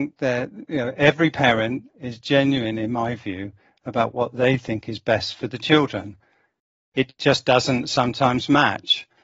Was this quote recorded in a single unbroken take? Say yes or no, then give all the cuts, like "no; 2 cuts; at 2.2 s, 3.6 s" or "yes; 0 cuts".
yes; 0 cuts